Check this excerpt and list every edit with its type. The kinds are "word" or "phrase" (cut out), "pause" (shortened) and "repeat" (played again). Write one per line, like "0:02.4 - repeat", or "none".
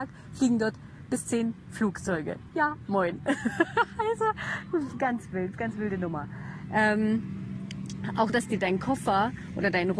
0:01.1 - word
0:05.5 - word
0:08.3 - word